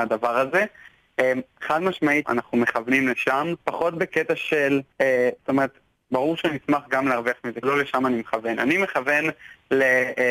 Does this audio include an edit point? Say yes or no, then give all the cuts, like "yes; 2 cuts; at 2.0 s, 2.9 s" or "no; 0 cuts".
yes; 5 cuts; at 2.2 s, 3.6 s, 4.9 s, 5.9 s, 7.6 s